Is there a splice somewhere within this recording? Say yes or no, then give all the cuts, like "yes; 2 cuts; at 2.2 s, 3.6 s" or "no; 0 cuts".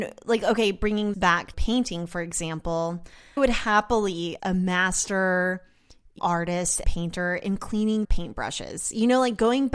yes; 7 cuts; at 1.1 s, 1.5 s, 3.4 s, 4.4 s, 6.2 s, 6.8 s, 8.0 s